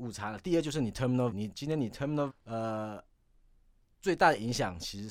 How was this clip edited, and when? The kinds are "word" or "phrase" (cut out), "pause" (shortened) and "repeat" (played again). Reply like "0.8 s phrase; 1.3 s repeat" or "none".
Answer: 1.3 s word; 2.3 s word